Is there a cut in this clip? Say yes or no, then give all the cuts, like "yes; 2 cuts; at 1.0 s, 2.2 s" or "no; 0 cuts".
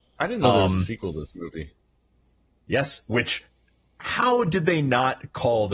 no; 0 cuts